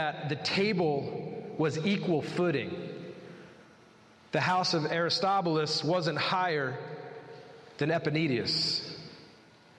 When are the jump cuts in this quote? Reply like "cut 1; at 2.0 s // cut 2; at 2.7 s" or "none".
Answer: none